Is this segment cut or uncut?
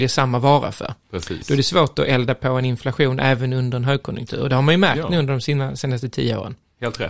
uncut